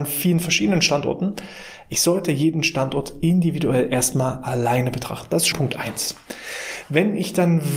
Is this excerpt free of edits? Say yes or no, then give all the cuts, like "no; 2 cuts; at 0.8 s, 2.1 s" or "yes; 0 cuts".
no; 1 cut; at 5.5 s